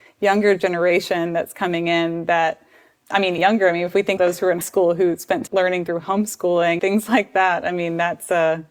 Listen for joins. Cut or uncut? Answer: cut